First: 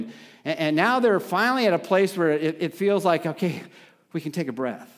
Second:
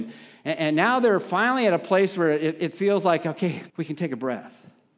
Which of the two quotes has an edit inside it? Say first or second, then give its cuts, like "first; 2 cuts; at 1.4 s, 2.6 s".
second; 1 cut; at 3.7 s